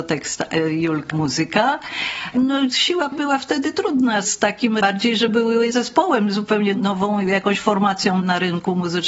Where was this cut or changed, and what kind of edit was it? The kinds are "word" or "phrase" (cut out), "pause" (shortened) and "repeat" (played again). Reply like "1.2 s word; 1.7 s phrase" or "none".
1.1 s word; 3.1 s word; 4.8 s phrase; 5.3 s word; 5.7 s word